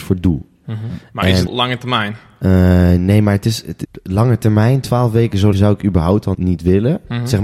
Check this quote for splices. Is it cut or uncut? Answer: cut